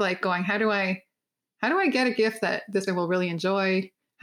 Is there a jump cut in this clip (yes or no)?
yes